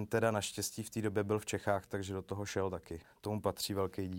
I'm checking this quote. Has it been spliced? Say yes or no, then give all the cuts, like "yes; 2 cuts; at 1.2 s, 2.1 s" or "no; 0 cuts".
no; 0 cuts